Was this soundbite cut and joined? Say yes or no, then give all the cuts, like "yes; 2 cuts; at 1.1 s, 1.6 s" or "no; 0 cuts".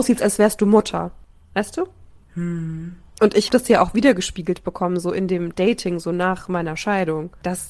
yes; 1 cut; at 3.5 s